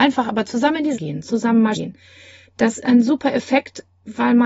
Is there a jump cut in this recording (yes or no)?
yes